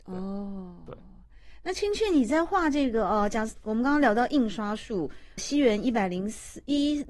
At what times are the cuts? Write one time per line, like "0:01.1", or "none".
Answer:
0:05.4